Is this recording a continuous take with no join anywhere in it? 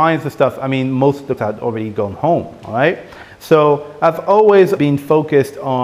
no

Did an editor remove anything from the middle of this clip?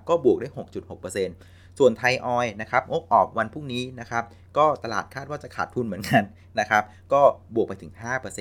no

